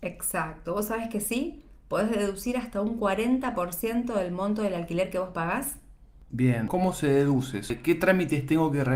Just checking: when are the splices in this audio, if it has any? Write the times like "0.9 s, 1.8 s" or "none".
none